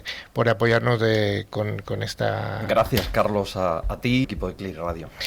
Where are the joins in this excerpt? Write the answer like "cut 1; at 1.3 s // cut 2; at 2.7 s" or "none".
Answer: cut 1; at 4.2 s